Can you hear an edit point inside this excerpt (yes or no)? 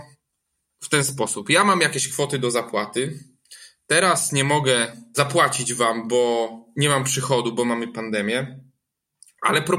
no